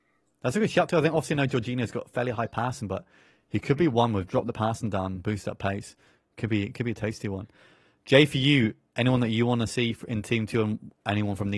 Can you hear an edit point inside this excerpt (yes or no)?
no